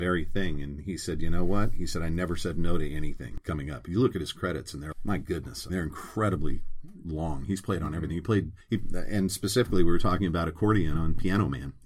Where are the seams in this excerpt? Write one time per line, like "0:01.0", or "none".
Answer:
0:04.9
0:05.7